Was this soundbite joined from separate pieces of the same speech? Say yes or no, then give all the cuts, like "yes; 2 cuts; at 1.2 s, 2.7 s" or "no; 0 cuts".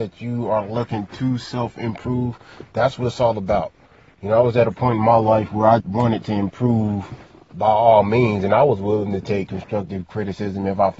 yes; 1 cut; at 5.8 s